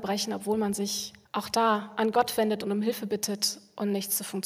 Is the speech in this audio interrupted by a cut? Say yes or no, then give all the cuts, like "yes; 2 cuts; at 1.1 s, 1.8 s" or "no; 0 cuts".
yes; 1 cut; at 1.2 s